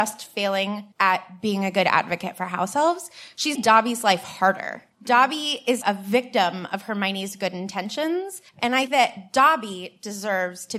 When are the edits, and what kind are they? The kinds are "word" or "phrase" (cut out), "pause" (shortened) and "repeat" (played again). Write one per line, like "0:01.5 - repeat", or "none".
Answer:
0:00.9 - pause
0:03.5 - word
0:04.9 - pause
0:05.8 - word
0:08.5 - pause
0:08.9 - word